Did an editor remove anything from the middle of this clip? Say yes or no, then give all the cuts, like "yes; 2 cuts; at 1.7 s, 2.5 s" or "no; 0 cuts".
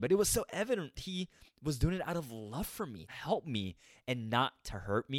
yes; 2 cuts; at 1.0 s, 3.1 s